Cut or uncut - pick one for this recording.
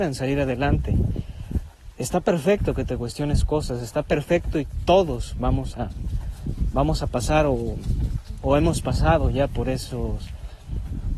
uncut